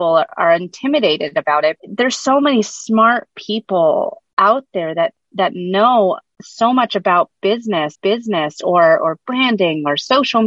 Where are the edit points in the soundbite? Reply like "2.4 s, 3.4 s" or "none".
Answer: 7.9 s